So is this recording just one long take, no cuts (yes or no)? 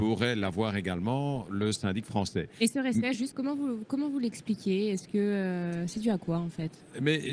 yes